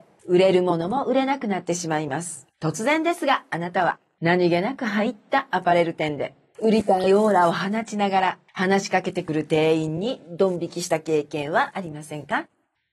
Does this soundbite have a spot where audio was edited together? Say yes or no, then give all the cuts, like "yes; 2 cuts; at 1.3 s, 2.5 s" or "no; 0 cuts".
yes; 1 cut; at 2.5 s